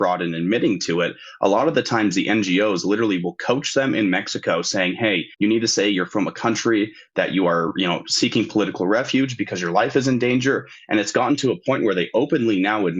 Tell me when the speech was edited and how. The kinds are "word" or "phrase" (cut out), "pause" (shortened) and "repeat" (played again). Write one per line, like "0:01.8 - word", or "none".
0:05.3 - pause